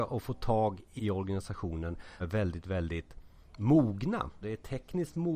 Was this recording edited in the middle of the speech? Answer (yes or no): yes